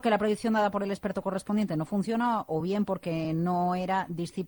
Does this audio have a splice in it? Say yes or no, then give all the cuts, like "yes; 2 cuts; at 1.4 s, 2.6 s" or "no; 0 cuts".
no; 0 cuts